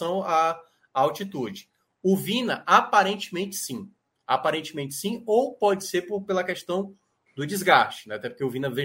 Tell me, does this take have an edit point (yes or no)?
no